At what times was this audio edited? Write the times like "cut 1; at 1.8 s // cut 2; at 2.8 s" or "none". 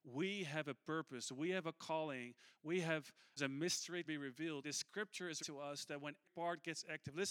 cut 1; at 3.4 s // cut 2; at 4.0 s // cut 3; at 4.6 s // cut 4; at 5.4 s // cut 5; at 6.2 s